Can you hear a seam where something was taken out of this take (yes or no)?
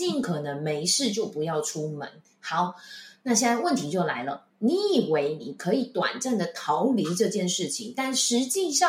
yes